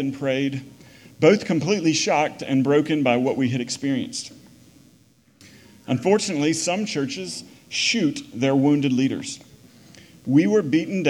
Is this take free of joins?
yes; 0 cuts

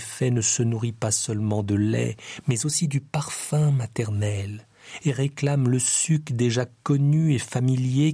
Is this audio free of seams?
yes; 0 cuts

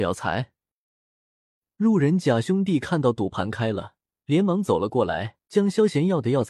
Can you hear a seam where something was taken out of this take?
yes; 2 cuts; at 4.1 s, 5.4 s

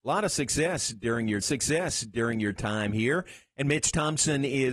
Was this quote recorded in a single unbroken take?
no; 1 cut; at 1.4 s

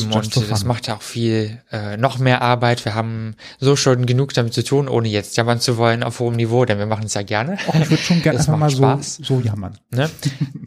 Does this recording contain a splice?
no; 0 cuts

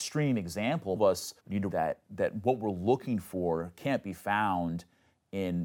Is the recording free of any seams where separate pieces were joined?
no; 4 cuts; at 1.0 s, 1.4 s, 1.7 s, 2.1 s

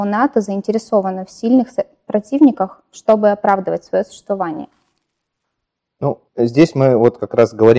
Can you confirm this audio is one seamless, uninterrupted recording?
no; 1 cut; at 6.3 s

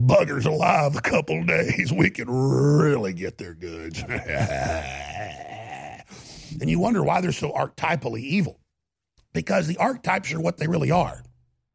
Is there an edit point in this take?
no; 0 cuts

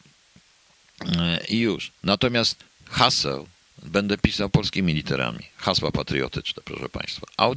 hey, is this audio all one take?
yes; 0 cuts

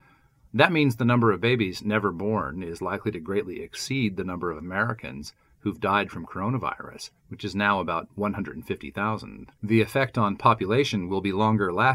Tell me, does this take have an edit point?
yes; 2 cuts; at 7.2 s, 9.5 s

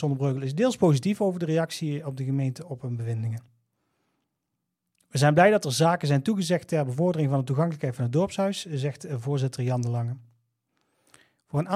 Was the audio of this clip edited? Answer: no; 0 cuts

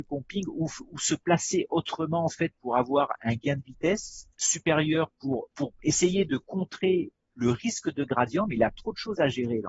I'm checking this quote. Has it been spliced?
yes; 2 cuts; at 4.3 s, 5.5 s

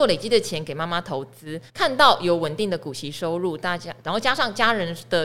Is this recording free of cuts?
no; 1 cut; at 1.7 s

